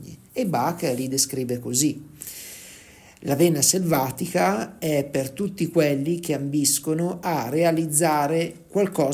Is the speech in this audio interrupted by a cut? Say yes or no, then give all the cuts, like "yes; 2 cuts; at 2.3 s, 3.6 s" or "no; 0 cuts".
no; 0 cuts